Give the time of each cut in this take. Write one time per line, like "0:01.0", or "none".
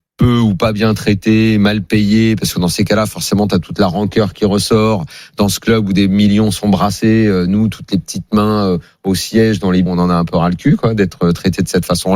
0:09.9